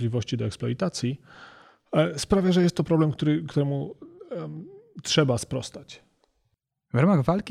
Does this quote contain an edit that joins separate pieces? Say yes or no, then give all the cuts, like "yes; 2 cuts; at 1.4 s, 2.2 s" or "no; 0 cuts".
no; 0 cuts